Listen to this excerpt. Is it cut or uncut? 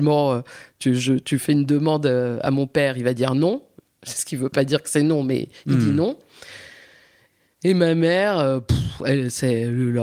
uncut